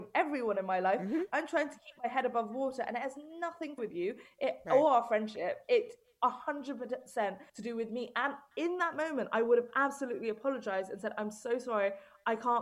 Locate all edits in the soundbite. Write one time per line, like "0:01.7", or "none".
0:03.8
0:07.5